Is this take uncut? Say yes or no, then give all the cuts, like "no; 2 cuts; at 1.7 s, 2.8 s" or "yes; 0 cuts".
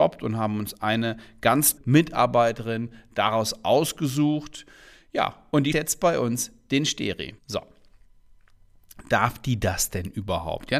no; 3 cuts; at 1.8 s, 5.7 s, 7.4 s